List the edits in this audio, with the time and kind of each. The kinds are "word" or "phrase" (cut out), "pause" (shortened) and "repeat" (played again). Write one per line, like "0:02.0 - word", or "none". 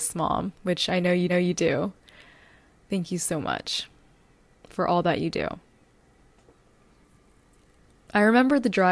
0:01.3 - repeat